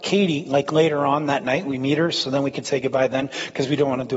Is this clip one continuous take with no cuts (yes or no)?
yes